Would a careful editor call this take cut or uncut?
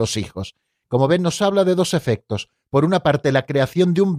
uncut